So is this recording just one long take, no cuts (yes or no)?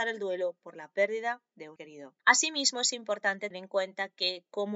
no